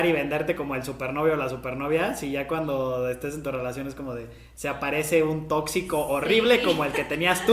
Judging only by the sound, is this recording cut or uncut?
uncut